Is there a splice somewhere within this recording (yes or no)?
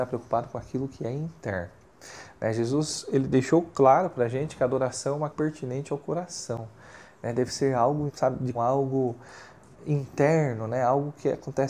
yes